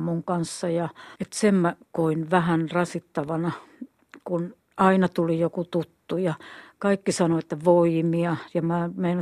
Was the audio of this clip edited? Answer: yes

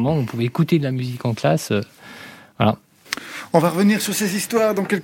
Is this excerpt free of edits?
yes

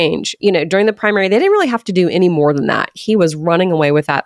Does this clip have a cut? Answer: no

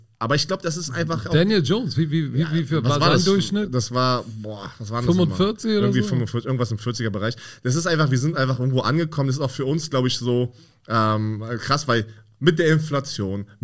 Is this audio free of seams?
yes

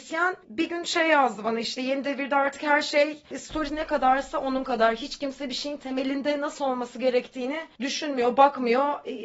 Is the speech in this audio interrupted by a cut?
yes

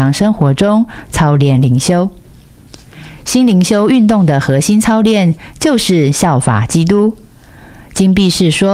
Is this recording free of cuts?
yes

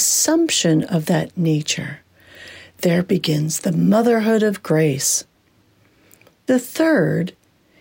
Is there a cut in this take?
no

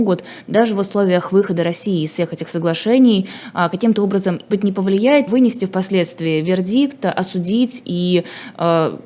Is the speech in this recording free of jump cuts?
no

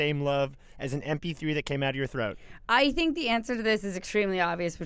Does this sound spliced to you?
no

